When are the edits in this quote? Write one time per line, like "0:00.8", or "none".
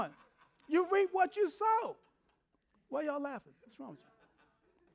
none